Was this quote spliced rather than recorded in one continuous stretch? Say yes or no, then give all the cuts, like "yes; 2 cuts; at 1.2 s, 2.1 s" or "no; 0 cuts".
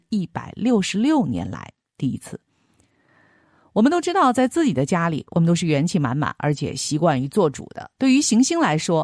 no; 0 cuts